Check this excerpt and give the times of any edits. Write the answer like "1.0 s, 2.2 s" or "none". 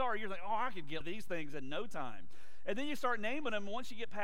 1.0 s